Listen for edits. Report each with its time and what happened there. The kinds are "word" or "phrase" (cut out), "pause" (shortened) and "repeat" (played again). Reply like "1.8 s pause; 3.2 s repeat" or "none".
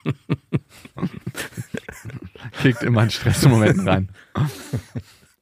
none